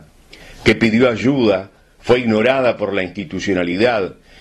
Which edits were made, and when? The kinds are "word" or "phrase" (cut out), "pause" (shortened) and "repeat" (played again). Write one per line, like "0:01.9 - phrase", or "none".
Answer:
none